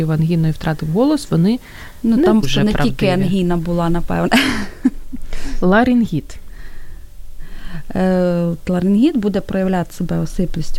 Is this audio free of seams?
no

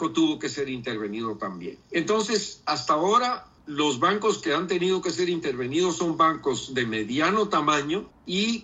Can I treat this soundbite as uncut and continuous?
yes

